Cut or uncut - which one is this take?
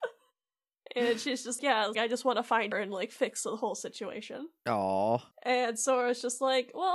cut